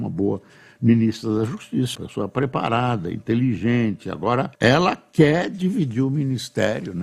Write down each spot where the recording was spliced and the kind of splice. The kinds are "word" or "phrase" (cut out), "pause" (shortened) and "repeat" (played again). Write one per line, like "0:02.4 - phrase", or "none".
0:01.9 - word
0:04.5 - pause